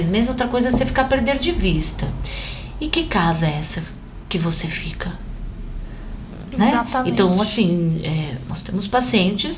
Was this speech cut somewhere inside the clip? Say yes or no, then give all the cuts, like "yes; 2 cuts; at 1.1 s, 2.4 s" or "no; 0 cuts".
no; 0 cuts